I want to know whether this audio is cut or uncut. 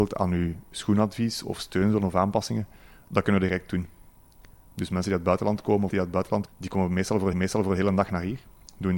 cut